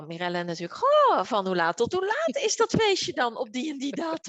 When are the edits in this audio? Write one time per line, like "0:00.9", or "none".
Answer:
none